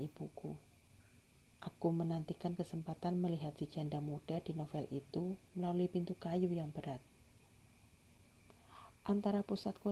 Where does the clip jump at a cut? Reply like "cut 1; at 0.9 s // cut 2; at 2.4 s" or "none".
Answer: none